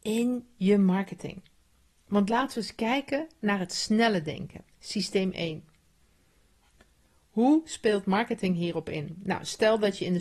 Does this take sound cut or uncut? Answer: uncut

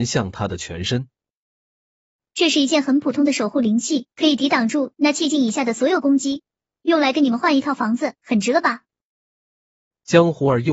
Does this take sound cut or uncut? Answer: cut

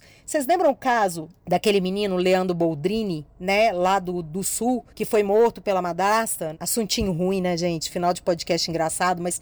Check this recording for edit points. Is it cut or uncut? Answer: cut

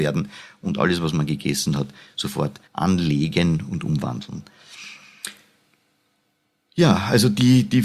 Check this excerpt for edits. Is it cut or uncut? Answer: cut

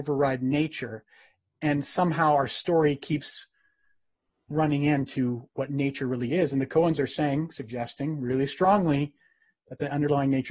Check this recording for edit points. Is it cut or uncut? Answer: uncut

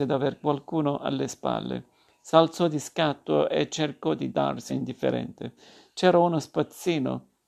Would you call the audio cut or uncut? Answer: cut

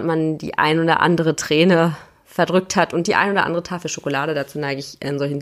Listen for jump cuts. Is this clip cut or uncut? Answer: uncut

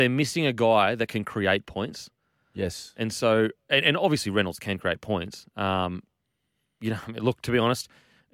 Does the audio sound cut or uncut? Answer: uncut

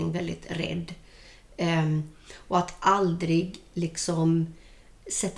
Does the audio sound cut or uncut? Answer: uncut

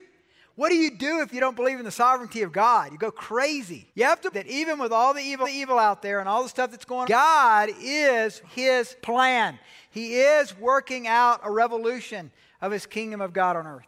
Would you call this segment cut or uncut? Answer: cut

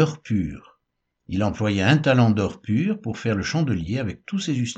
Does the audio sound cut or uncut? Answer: uncut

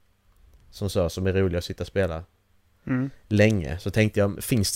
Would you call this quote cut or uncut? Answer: uncut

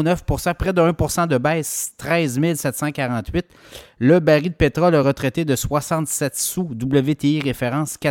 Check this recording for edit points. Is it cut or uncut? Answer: uncut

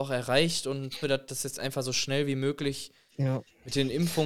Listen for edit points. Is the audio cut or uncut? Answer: cut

